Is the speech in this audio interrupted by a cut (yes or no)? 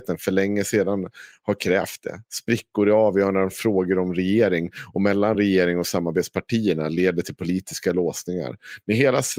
no